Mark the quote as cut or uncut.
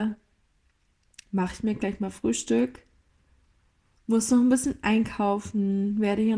uncut